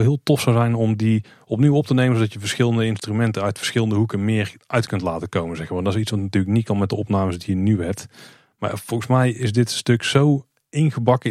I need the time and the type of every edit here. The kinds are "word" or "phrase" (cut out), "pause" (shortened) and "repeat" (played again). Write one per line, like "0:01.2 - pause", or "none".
none